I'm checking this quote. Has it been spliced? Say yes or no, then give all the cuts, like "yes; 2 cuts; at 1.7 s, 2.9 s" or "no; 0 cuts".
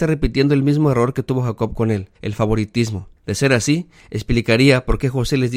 yes; 2 cuts; at 2.2 s, 3.2 s